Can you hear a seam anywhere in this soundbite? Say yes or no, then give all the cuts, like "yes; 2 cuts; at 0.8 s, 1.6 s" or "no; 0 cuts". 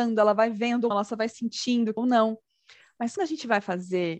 yes; 3 cuts; at 0.9 s, 2.0 s, 3.2 s